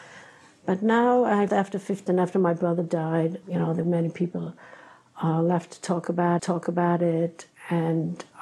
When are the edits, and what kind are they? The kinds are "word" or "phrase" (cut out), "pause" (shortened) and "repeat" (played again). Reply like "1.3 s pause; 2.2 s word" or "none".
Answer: 1.5 s word; 2.1 s word; 3.4 s word; 3.8 s word; 6.4 s repeat